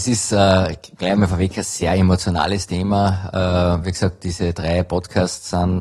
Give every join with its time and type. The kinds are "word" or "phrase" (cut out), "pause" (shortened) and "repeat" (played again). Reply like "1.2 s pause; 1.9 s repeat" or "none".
none